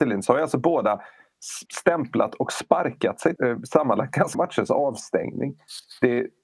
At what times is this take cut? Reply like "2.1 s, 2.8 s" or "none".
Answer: 1.6 s, 3.4 s, 4.3 s